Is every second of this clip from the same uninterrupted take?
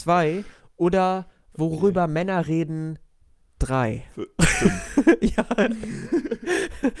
yes; 0 cuts

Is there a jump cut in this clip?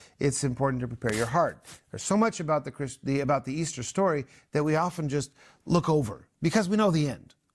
no; 0 cuts

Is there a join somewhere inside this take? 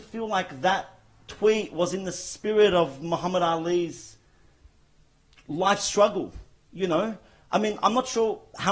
no; 0 cuts

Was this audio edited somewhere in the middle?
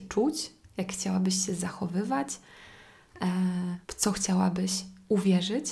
yes; 1 cut; at 3.8 s

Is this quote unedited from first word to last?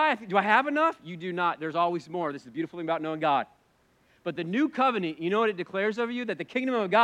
yes; 0 cuts

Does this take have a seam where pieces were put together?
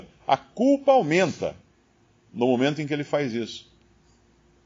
no; 0 cuts

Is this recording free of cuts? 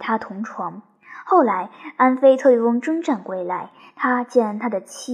yes; 0 cuts

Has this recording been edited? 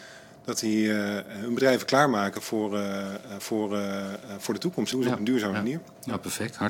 yes; 2 cuts; at 3.4 s, 4.9 s

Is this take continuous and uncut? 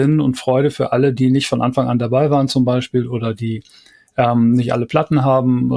yes; 0 cuts

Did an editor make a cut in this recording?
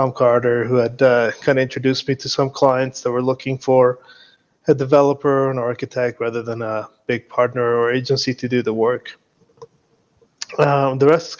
no; 0 cuts

